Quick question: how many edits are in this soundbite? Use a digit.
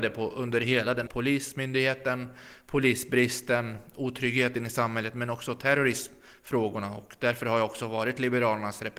1